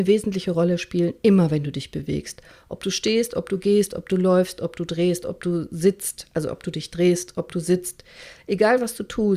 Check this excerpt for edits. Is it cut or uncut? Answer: uncut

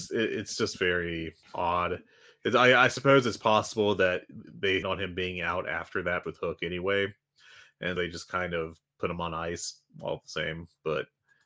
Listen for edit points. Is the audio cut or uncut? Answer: cut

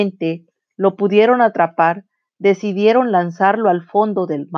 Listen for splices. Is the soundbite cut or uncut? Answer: uncut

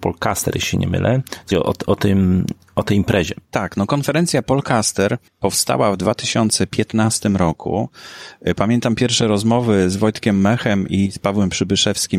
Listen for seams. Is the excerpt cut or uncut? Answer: cut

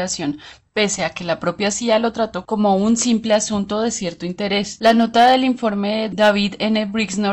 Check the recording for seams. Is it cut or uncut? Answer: uncut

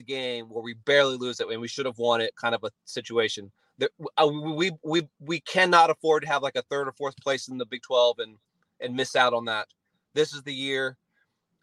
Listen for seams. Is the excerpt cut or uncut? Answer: uncut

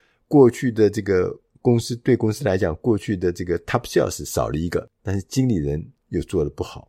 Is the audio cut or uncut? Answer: cut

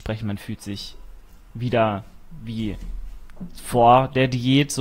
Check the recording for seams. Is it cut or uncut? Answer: uncut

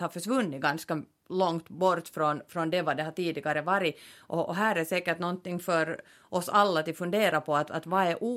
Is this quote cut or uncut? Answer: uncut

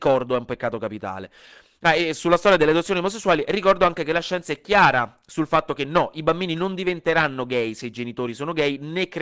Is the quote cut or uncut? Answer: uncut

